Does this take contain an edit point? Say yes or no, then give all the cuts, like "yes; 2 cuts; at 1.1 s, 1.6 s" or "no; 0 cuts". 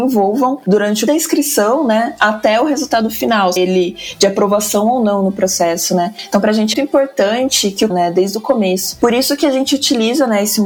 yes; 4 cuts; at 1.1 s, 3.6 s, 6.7 s, 7.9 s